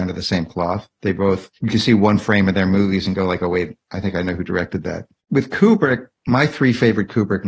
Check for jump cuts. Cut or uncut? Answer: cut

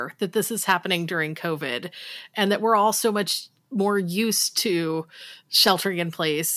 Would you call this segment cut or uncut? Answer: uncut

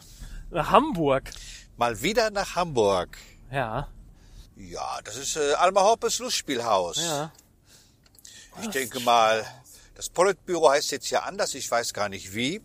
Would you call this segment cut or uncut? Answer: uncut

